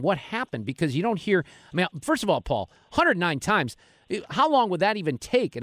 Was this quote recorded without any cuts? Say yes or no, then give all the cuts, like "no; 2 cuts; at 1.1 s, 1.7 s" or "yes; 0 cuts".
yes; 0 cuts